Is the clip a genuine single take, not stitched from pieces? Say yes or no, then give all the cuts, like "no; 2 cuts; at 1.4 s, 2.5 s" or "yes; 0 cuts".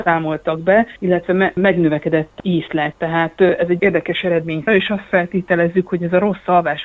no; 4 cuts; at 1.0 s, 2.9 s, 3.8 s, 4.7 s